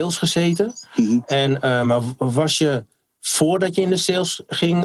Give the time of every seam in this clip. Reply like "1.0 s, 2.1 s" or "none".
none